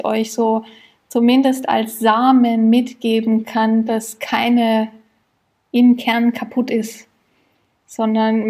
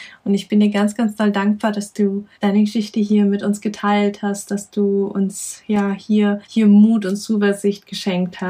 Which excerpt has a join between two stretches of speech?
second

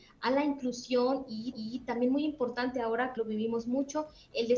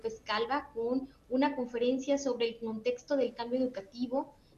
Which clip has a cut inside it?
first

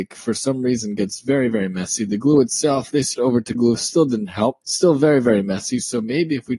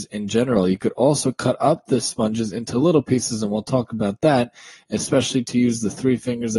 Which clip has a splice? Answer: first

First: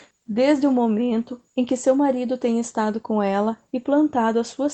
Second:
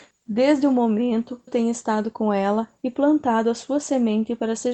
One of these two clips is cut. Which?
second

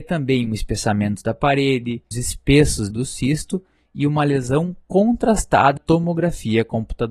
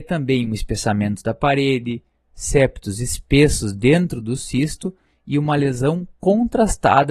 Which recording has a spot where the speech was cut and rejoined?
first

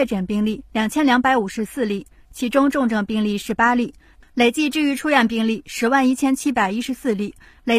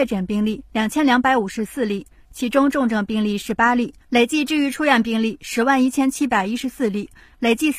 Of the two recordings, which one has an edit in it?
second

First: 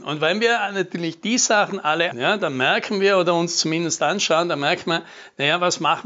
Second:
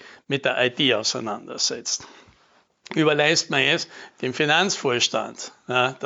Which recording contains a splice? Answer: first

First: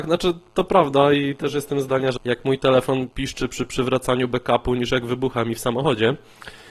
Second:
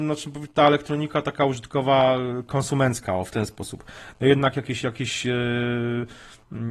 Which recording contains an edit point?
first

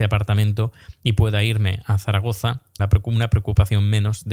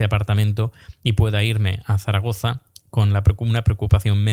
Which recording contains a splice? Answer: first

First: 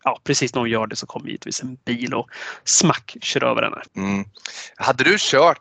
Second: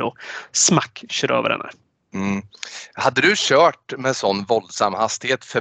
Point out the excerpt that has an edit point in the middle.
first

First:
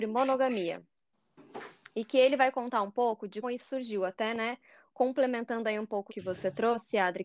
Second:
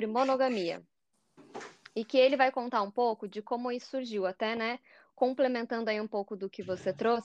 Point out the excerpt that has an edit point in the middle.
first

